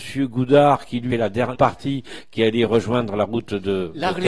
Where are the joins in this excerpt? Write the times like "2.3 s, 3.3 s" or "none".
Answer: 1.1 s, 1.5 s